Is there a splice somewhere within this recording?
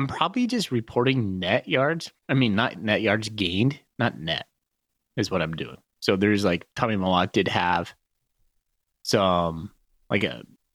no; 0 cuts

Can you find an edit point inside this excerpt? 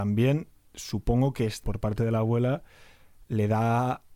yes; 1 cut; at 1.6 s

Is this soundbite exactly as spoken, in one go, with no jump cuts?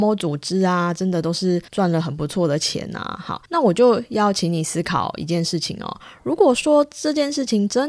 no; 2 cuts; at 1.7 s, 3.4 s

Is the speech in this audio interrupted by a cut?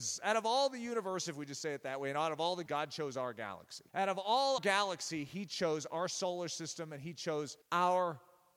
yes; 4 cuts; at 2.7 s, 3.9 s, 4.6 s, 7.6 s

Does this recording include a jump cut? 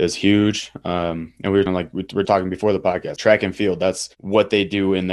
yes; 3 cuts; at 1.7 s, 2.2 s, 3.2 s

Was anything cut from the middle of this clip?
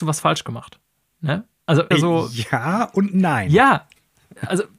yes; 1 cut; at 1.9 s

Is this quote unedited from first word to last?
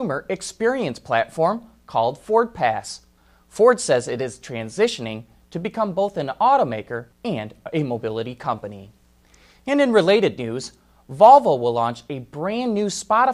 no; 1 cut; at 7.1 s

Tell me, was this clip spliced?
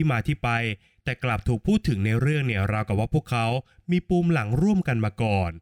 no; 0 cuts

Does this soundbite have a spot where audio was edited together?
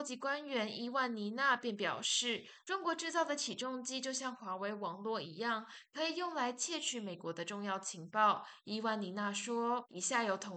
no; 0 cuts

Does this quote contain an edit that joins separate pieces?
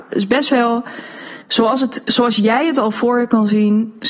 yes; 1 cut; at 1.4 s

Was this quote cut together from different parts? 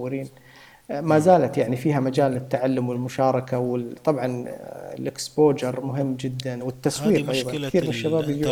no; 0 cuts

